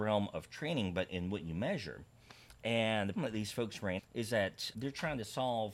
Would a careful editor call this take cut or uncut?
cut